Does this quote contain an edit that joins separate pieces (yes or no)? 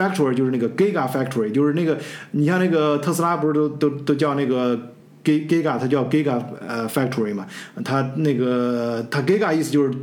no